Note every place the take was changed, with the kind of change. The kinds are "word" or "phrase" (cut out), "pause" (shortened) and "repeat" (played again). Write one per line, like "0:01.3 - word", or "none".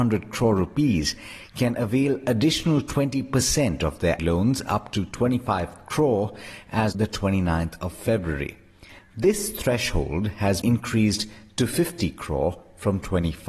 0:04.2 - word
0:06.9 - word
0:10.6 - word